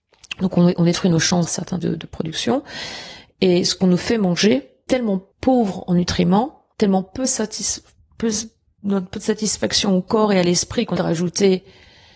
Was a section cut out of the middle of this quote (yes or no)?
yes